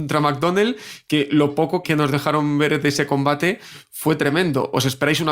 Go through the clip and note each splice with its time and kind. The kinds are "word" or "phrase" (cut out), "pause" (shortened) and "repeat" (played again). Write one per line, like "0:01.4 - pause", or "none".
0:01.8 - word